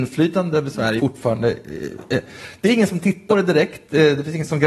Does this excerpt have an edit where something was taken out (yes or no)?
yes